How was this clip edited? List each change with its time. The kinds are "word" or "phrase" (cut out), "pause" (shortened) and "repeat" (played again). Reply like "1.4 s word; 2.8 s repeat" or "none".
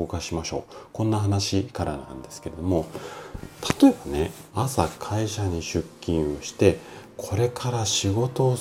4.5 s pause